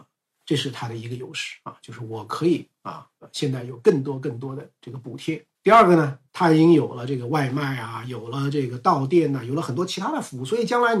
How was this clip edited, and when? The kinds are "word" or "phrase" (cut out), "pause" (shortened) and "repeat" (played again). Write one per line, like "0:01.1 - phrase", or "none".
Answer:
0:05.5 - pause
0:06.3 - pause